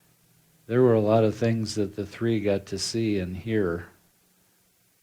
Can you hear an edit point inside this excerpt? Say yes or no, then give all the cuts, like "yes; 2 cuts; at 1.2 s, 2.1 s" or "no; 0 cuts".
no; 0 cuts